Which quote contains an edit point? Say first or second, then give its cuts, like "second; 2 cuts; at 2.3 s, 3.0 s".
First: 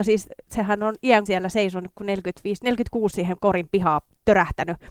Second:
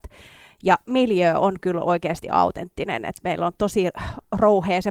first; 2 cuts; at 1.3 s, 3.1 s